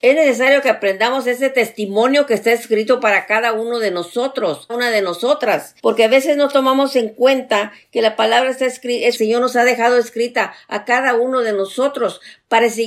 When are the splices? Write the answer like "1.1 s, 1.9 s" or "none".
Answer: 4.7 s, 5.8 s, 9.2 s